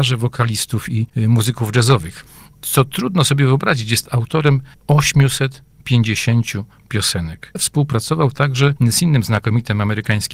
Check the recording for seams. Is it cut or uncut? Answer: cut